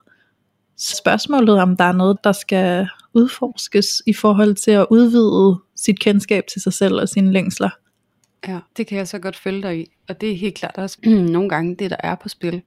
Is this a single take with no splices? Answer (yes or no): no